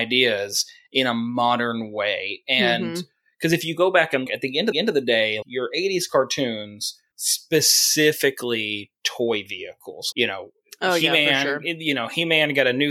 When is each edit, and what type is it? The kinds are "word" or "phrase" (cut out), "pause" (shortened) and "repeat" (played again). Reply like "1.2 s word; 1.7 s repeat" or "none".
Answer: 4.3 s word; 4.7 s repeat; 5.4 s word; 7.1 s word; 10.1 s word